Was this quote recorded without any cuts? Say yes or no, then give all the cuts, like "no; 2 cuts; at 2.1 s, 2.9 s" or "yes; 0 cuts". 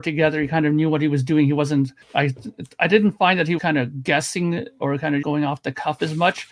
no; 3 cuts; at 2.0 s, 3.6 s, 5.2 s